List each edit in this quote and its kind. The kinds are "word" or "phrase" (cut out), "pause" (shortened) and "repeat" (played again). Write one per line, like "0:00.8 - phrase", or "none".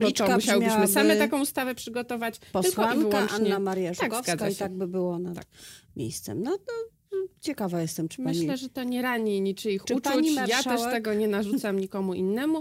none